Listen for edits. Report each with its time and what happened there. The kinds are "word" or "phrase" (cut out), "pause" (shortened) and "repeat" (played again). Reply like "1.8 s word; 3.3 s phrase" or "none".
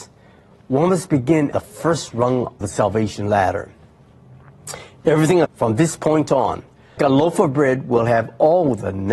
1.5 s word; 2.6 s word; 5.4 s word; 7.0 s word